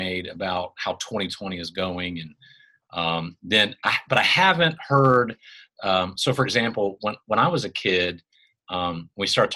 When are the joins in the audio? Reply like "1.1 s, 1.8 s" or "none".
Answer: none

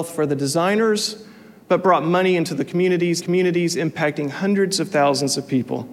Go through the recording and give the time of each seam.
3.2 s

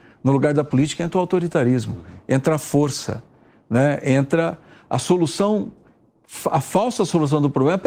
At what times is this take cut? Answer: none

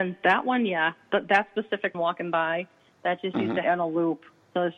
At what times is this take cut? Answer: 1.9 s, 3.6 s

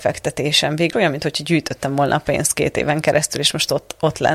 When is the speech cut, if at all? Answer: 0.9 s

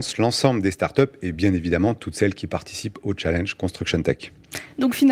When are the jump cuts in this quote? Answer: none

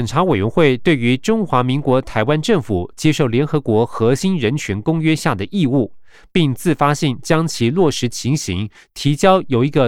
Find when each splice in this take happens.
none

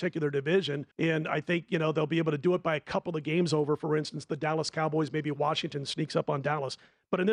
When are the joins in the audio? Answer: 0.9 s

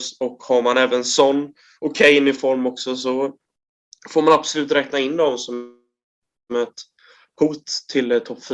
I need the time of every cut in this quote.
none

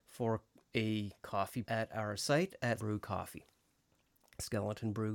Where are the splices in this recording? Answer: 1.6 s, 2.2 s, 2.8 s

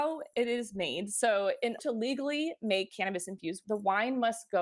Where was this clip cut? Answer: 1.8 s, 3.6 s

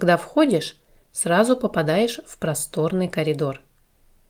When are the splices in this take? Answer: none

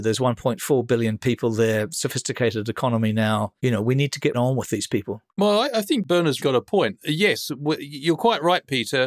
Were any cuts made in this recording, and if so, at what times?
3.6 s, 4.3 s, 5.3 s, 6.4 s

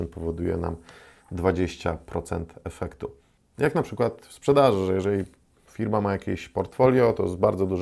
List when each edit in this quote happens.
none

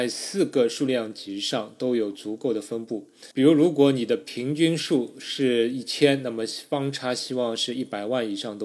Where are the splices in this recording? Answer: 3.3 s

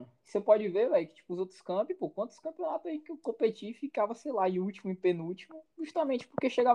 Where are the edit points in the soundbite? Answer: none

